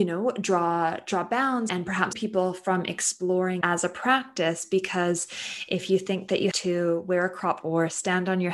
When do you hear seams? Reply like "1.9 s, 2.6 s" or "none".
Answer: 1.7 s, 2.1 s, 3.6 s, 6.5 s, 7.6 s

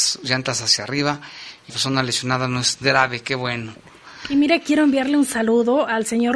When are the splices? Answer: 1.7 s, 2.8 s

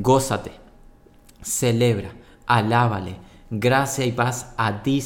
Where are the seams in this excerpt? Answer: none

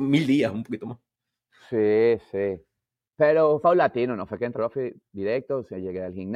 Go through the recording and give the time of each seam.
3.6 s, 4.5 s

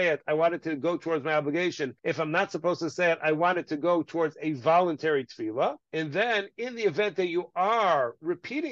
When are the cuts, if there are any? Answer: 2.0 s, 5.8 s

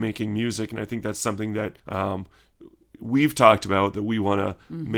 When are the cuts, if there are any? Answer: 1.8 s

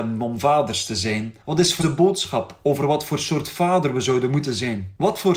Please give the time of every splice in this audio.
1.4 s, 1.8 s

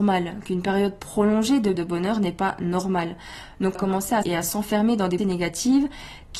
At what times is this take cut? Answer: 1.7 s, 3.7 s, 4.2 s, 5.2 s

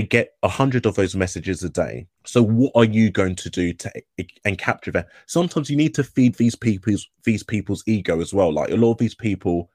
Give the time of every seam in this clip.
2.1 s

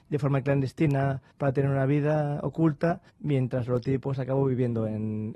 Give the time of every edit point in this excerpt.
1.3 s, 3.1 s

